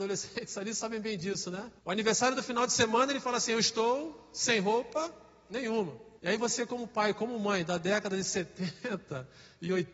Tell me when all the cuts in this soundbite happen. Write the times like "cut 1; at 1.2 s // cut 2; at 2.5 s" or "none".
cut 1; at 1.8 s // cut 2; at 6.2 s